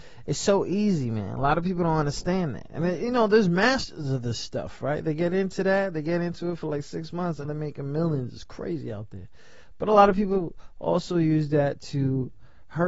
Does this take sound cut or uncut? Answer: cut